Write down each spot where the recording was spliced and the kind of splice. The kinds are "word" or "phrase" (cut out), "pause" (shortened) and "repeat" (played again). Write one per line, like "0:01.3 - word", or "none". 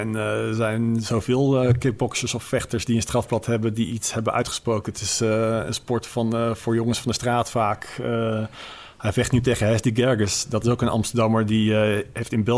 none